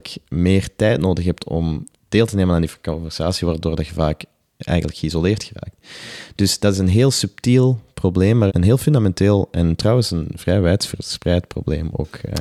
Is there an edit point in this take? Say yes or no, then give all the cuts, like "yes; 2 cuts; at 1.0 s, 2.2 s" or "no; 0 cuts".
yes; 1 cut; at 8.5 s